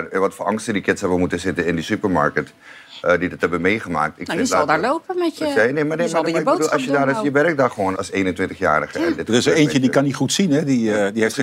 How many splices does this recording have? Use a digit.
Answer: 1